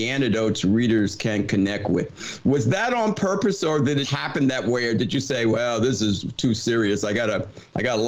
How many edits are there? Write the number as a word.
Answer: one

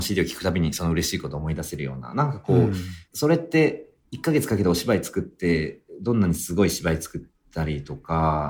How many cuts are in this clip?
one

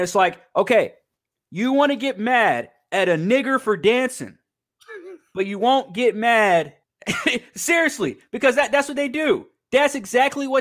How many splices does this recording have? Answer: two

